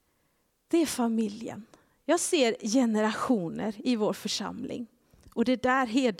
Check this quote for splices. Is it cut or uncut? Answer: uncut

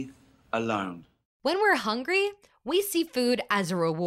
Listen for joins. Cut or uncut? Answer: uncut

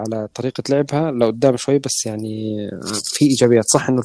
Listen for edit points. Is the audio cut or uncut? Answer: uncut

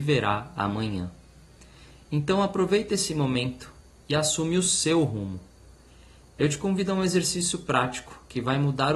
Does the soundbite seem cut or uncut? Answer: uncut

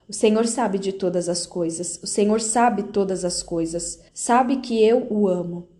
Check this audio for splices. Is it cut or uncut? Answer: cut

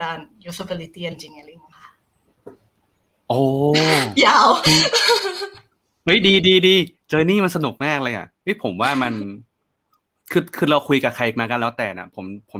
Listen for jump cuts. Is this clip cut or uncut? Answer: uncut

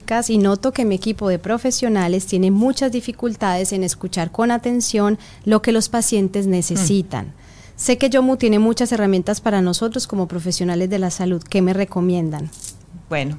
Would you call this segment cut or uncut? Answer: uncut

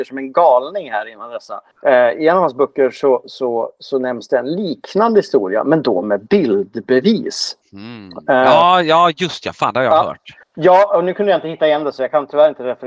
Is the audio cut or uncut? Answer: cut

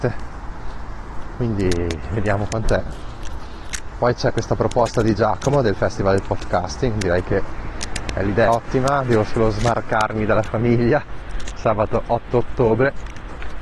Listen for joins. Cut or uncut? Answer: cut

